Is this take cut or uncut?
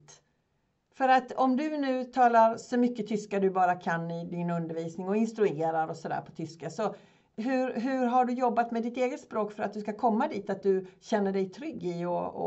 uncut